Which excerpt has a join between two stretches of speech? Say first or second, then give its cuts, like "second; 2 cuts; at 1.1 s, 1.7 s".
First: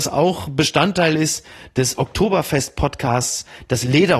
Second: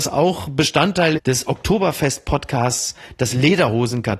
second; 1 cut; at 1.2 s